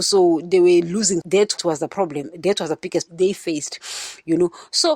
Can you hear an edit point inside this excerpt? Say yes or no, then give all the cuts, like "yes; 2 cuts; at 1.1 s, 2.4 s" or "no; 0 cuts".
yes; 3 cuts; at 1.2 s, 1.6 s, 3.1 s